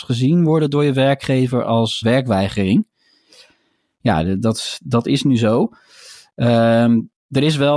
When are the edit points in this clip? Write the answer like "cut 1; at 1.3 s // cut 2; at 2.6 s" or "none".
cut 1; at 2.0 s